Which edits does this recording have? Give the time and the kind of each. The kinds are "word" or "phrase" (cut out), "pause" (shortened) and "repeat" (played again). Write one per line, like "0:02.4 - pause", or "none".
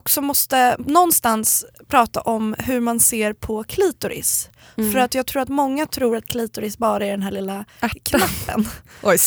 none